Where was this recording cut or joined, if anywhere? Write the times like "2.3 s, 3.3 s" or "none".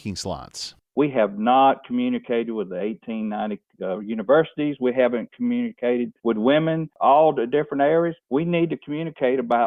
6.2 s, 8.2 s